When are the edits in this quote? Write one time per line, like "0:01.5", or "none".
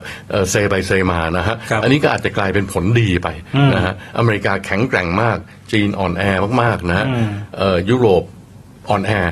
none